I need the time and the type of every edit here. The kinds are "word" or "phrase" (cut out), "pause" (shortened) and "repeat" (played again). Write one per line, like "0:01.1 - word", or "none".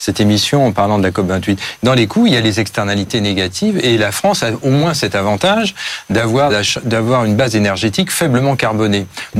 0:06.5 - word